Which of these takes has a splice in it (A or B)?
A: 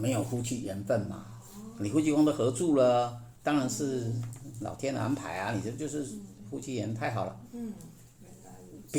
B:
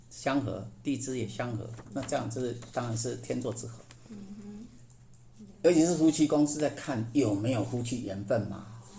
A